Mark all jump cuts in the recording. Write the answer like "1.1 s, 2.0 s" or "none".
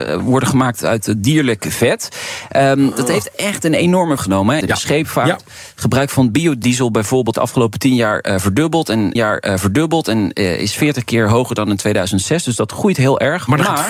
4.2 s, 4.6 s, 7.3 s, 9.2 s